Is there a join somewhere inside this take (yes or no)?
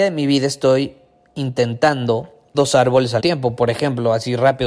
yes